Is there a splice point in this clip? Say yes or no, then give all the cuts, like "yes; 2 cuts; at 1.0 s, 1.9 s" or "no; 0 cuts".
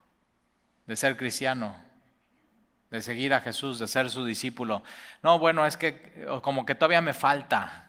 no; 0 cuts